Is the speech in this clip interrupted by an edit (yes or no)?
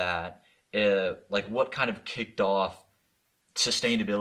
no